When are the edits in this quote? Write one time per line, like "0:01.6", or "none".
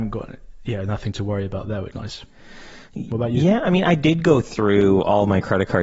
0:01.9